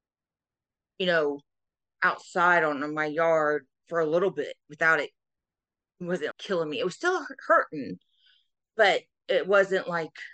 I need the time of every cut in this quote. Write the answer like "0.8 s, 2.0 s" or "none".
6.3 s